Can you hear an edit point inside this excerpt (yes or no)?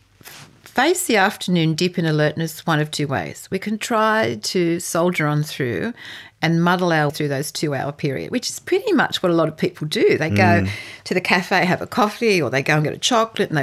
yes